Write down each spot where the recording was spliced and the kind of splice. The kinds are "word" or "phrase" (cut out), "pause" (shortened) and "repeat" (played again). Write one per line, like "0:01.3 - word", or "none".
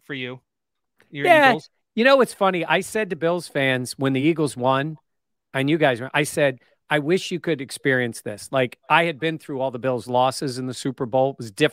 none

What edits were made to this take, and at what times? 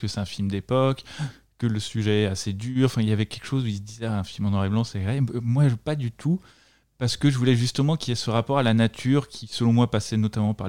none

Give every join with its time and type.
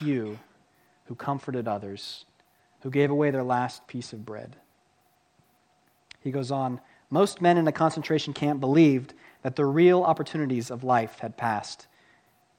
none

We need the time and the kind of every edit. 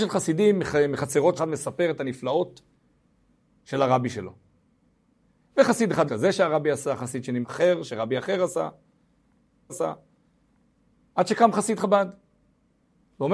0:01.4 - phrase
0:06.1 - phrase
0:07.4 - phrase
0:09.7 - repeat

